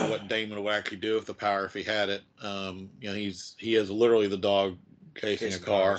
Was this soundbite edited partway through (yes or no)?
no